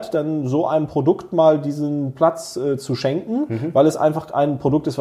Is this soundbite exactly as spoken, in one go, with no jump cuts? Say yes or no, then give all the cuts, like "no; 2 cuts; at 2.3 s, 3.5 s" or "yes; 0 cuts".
yes; 0 cuts